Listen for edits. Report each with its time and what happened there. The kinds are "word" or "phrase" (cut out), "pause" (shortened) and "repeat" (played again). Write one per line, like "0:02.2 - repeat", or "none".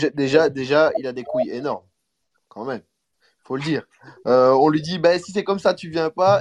none